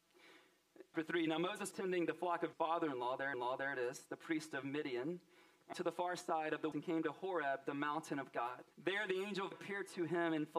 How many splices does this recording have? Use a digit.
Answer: 8